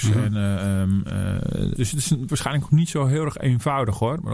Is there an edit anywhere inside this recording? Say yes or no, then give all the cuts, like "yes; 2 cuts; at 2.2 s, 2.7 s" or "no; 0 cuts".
yes; 2 cuts; at 1.8 s, 2.3 s